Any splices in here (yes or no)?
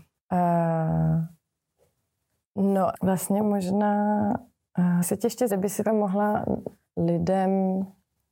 yes